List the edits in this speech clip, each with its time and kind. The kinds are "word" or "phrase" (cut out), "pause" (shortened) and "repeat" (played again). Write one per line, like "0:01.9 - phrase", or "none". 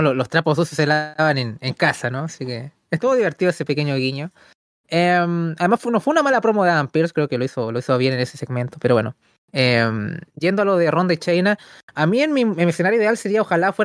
none

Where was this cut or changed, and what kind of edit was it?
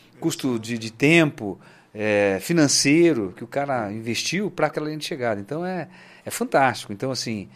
0:04.7 - word

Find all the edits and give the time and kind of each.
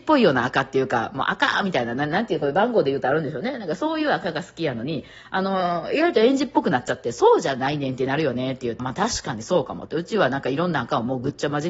0:08.8 - word

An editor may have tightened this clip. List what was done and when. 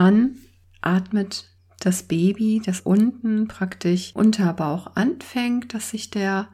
0:02.8 - word
0:04.2 - word

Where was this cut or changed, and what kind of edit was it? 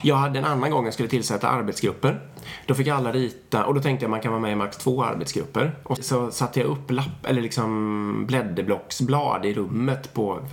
0:06.0 - word

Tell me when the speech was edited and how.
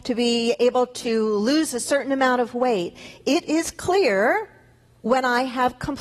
none

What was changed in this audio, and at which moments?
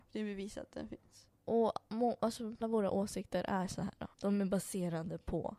0:01.4 - pause
0:02.6 - word
0:04.1 - pause

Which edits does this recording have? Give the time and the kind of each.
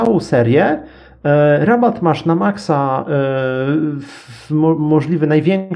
none

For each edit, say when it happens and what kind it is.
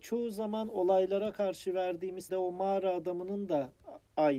0:02.3 - word

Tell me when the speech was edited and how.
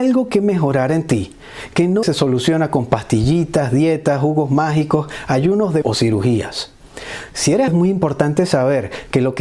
0:02.0 - word
0:05.8 - word
0:07.7 - word

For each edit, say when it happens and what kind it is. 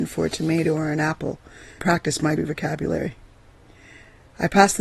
0:01.8 - word
0:02.4 - word

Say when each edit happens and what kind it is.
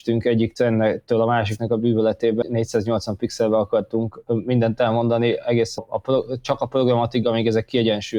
0:02.4 - word
0:05.8 - word
0:07.2 - word

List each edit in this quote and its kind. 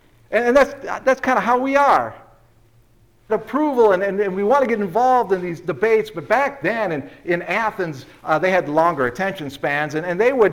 0:03.3 - phrase

